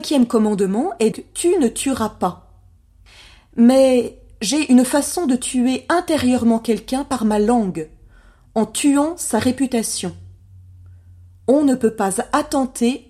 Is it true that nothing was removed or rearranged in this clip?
no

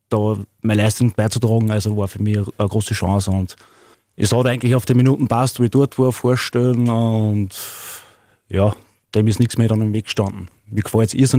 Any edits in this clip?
no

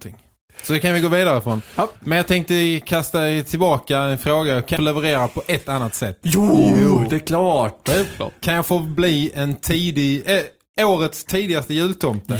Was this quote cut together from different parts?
yes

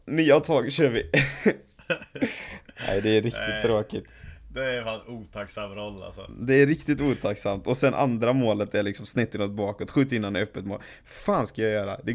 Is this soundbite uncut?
yes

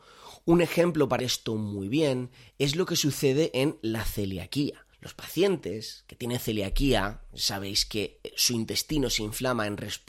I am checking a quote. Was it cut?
yes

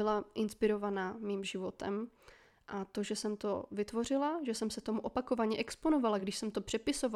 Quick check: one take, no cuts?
yes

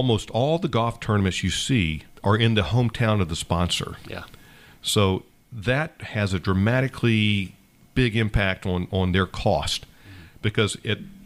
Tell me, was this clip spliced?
no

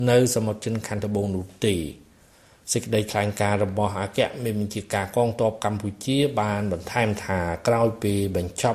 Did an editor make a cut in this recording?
no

